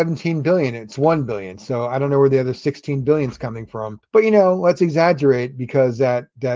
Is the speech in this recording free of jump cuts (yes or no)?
no